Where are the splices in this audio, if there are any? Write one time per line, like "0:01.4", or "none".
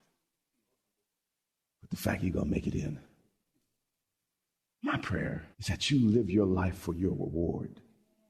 0:05.5

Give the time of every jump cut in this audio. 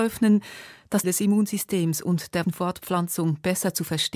0:01.0
0:02.4

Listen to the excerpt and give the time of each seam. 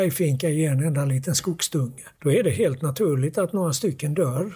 0:02.1

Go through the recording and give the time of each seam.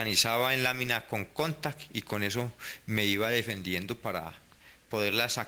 none

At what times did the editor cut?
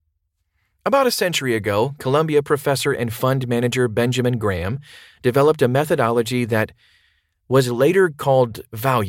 none

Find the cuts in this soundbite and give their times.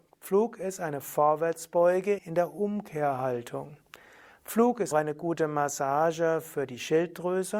0:02.2
0:04.9

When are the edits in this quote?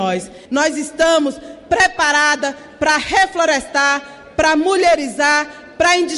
none

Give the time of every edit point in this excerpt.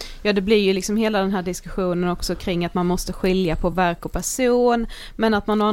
none

